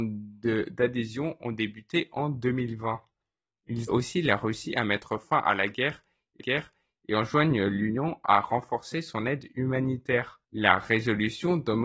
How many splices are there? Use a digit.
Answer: 3